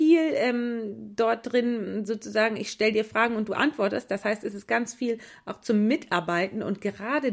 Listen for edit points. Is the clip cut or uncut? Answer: uncut